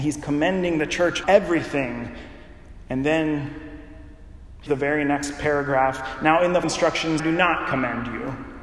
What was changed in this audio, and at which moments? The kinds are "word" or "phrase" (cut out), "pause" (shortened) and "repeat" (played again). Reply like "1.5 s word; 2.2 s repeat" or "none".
1.2 s word; 4.7 s word; 6.6 s word; 7.2 s word